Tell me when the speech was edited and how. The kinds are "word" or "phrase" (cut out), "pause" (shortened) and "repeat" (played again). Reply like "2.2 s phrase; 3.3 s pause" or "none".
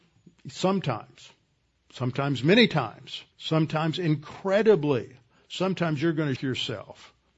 3.3 s pause; 6.4 s word